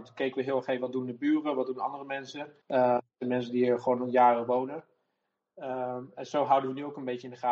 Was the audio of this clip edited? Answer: yes; 1 cut; at 2.6 s

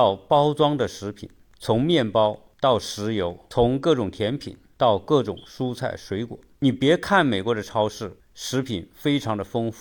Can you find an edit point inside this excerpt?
no; 0 cuts

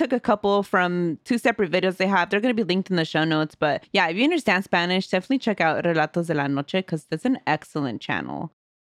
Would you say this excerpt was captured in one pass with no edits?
no; 1 cut; at 3.8 s

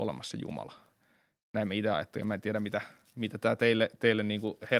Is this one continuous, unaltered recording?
yes; 0 cuts

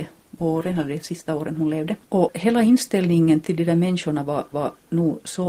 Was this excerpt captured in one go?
no; 3 cuts; at 2.0 s, 3.4 s, 4.5 s

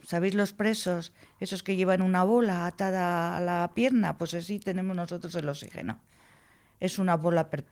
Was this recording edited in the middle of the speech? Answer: no; 0 cuts

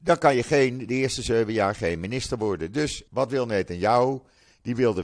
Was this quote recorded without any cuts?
no; 1 cut; at 3.1 s

